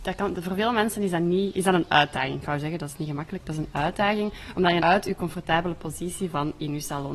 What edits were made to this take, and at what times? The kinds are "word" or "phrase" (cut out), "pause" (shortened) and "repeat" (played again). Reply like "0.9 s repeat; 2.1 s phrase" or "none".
4.8 s word

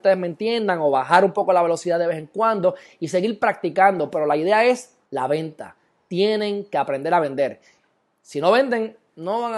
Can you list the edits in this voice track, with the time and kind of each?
5.0 s pause

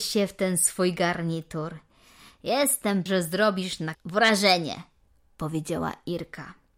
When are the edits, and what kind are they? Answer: 3.1 s word; 3.9 s word

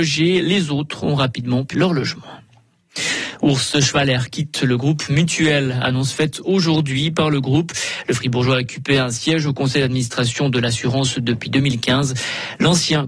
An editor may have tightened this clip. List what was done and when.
1.7 s word

